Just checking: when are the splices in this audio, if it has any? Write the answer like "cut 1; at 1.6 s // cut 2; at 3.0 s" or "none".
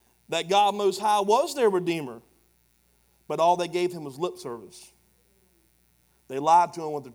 none